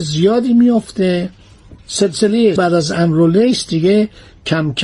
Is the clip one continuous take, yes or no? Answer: no